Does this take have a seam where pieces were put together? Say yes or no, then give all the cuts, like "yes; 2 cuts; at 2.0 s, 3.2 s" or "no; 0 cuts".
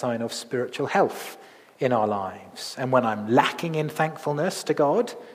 no; 0 cuts